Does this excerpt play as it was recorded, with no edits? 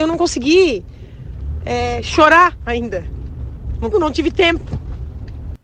no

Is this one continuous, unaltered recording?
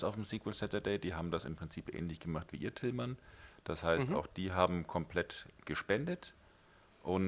yes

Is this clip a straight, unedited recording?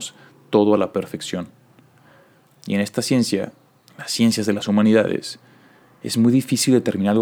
yes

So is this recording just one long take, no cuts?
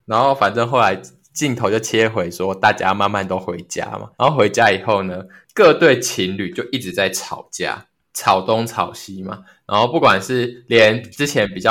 no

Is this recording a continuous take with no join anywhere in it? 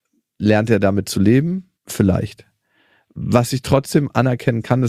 no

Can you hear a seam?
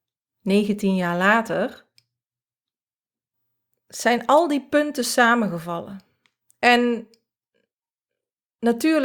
no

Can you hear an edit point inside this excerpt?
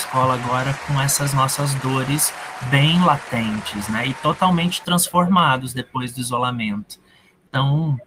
no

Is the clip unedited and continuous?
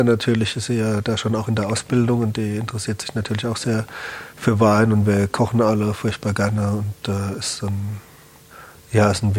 yes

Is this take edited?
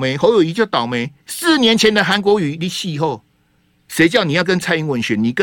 yes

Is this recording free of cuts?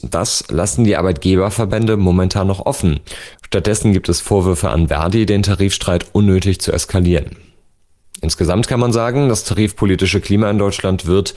yes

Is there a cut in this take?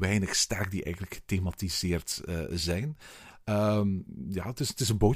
no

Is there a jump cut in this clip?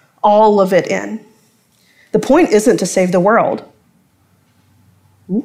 no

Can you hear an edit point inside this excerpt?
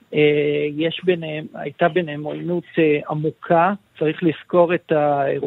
yes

